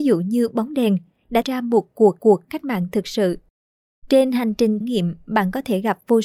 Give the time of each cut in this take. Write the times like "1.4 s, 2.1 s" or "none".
1.4 s, 2.2 s, 3.6 s, 4.8 s

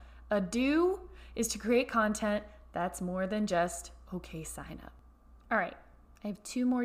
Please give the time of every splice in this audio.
none

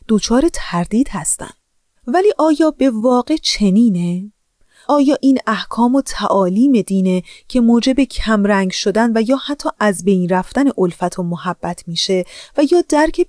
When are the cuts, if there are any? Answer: none

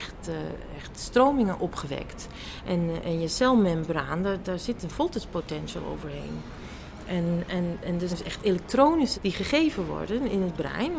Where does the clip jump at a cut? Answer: 4.4 s, 8.1 s, 9.1 s

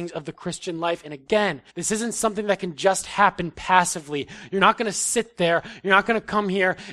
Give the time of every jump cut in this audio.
1.7 s

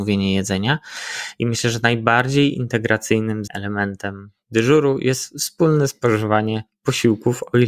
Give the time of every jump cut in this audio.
3.5 s

